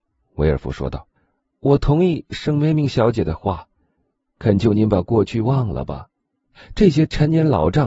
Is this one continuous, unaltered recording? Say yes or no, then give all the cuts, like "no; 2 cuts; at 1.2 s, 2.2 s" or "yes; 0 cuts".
no; 1 cut; at 1.2 s